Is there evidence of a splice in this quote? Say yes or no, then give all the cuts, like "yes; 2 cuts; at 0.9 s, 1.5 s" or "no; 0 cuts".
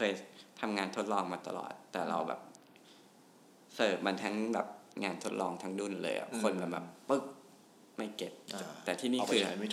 no; 0 cuts